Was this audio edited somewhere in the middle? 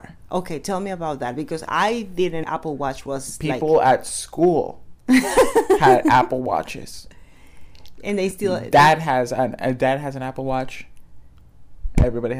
yes; 1 cut; at 2.4 s

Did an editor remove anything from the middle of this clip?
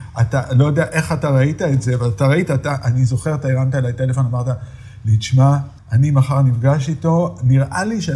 yes; 1 cut; at 5.8 s

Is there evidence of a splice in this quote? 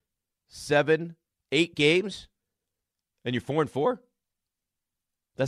no; 0 cuts

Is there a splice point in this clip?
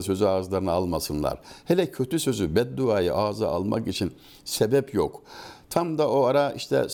no; 0 cuts

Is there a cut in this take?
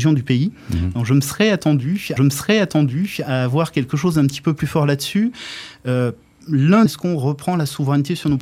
yes; 2 cuts; at 2.2 s, 6.9 s

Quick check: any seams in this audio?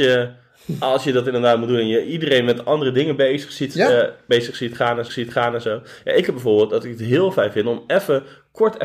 yes; 1 cut; at 5.1 s

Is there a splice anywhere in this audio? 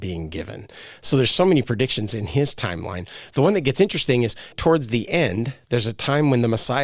yes; 1 cut; at 4.5 s

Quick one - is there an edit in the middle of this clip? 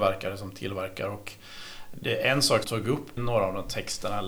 yes; 2 cuts; at 2.6 s, 3.2 s

